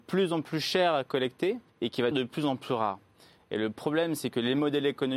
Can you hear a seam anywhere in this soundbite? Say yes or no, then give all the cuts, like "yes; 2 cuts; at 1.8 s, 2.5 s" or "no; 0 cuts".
yes; 2 cuts; at 1.7 s, 2.1 s